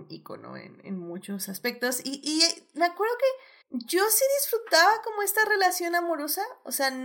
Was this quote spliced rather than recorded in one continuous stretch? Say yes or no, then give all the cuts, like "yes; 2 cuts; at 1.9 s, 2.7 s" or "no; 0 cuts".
yes; 1 cut; at 3.6 s